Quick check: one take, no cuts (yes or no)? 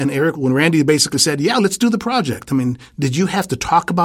yes